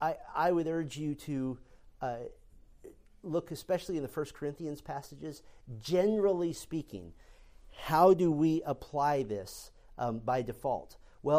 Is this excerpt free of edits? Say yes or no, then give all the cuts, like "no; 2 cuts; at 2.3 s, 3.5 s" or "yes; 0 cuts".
yes; 0 cuts